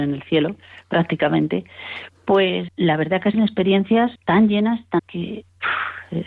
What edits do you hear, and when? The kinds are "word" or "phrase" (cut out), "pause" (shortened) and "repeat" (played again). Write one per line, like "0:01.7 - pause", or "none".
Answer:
0:02.7 - word
0:03.3 - word
0:04.2 - pause
0:05.0 - word